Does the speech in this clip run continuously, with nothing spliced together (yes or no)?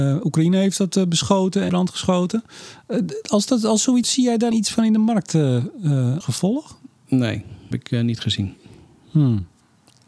no